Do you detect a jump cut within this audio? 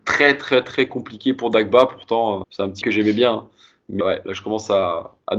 yes; 3 cuts; at 2.4 s, 2.8 s, 4.0 s

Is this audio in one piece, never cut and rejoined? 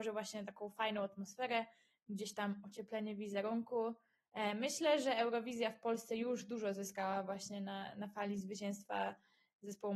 yes; 0 cuts

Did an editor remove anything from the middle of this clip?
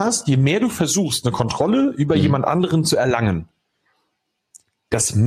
no; 0 cuts

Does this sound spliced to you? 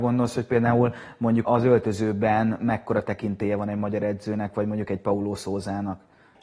yes; 1 cut; at 1.4 s

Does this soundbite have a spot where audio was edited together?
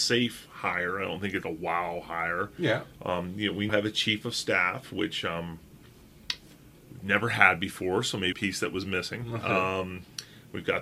yes; 3 cuts; at 1.4 s, 3.7 s, 8.3 s

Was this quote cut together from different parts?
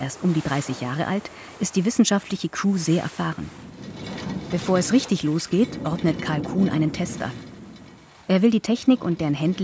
no; 0 cuts

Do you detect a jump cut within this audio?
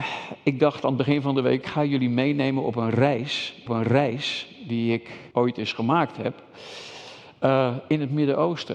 yes; 3 cuts; at 1.6 s, 3.7 s, 5.3 s

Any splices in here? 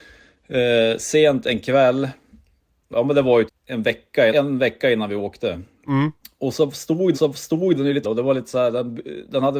yes; 6 cuts; at 2.9 s, 3.5 s, 4.3 s, 6.2 s, 7.1 s, 8.0 s

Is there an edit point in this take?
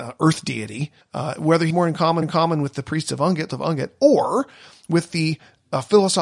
yes; 4 cuts; at 1.0 s, 1.7 s, 2.2 s, 3.5 s

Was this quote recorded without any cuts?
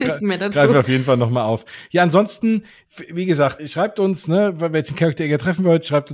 no; 1 cut; at 3.6 s

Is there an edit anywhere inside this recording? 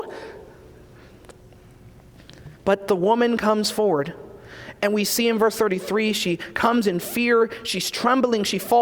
yes; 1 cut; at 2.5 s

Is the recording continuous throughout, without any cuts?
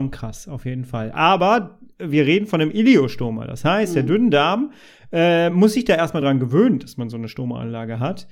yes; 0 cuts

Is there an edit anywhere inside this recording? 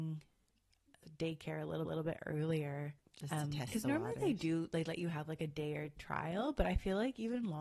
yes; 3 cuts; at 1.9 s, 3.0 s, 6.0 s

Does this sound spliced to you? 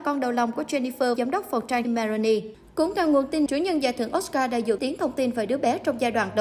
yes; 4 cuts; at 1.2 s, 1.8 s, 3.5 s, 4.8 s

